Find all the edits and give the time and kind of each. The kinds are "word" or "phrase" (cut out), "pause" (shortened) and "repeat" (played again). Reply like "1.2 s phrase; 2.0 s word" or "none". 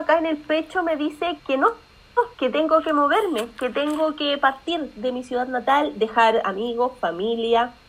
1.4 s word; 2.3 s pause